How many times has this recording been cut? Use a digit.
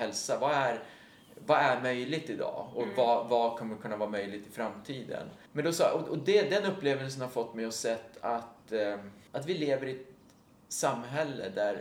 2